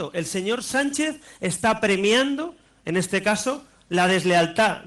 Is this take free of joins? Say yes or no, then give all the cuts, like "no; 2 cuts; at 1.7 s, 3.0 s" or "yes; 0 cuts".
yes; 0 cuts